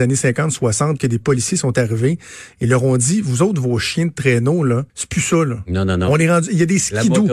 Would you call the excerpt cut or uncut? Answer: cut